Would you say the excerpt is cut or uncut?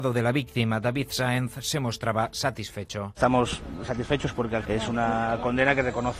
cut